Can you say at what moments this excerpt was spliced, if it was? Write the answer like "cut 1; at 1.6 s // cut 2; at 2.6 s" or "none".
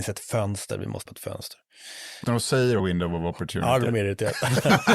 cut 1; at 1.1 s // cut 2; at 2.2 s // cut 3; at 2.8 s // cut 4; at 3.9 s